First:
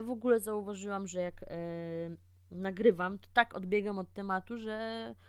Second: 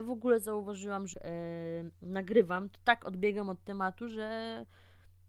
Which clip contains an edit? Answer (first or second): second